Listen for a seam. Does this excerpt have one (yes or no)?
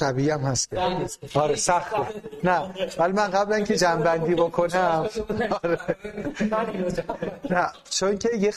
no